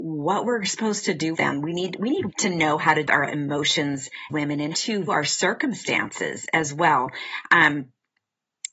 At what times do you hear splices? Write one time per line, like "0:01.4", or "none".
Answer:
0:01.3
0:02.3
0:03.1
0:04.3
0:04.7
0:05.1